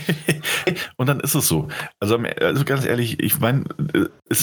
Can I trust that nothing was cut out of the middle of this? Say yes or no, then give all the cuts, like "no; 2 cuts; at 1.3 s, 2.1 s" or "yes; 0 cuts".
yes; 0 cuts